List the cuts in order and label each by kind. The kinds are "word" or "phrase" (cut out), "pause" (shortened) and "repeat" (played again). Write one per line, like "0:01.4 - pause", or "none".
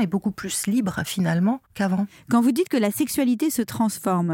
0:01.7 - pause